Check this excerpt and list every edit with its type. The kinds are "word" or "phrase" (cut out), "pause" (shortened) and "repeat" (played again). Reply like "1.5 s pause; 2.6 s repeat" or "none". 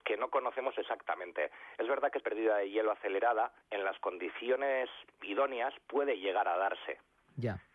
2.2 s phrase; 3.6 s pause